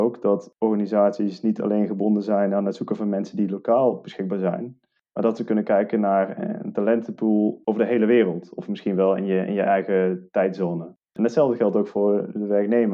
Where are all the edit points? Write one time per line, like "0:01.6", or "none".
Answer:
none